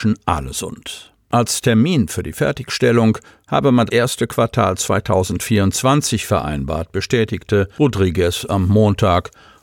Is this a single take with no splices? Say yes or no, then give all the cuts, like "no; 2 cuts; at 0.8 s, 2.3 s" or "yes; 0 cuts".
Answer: no; 1 cut; at 3.9 s